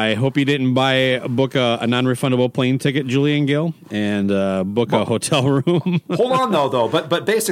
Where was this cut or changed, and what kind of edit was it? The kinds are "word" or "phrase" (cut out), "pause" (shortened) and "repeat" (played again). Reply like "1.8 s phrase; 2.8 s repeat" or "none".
none